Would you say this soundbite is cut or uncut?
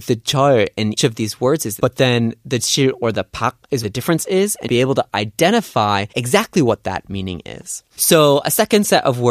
cut